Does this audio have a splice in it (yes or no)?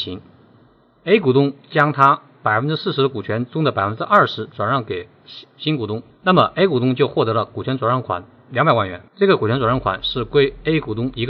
yes